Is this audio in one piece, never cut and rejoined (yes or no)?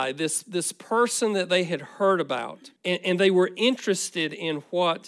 no